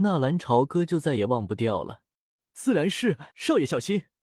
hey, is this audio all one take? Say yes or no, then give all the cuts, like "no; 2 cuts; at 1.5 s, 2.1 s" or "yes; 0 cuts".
no; 2 cuts; at 2.3 s, 3.3 s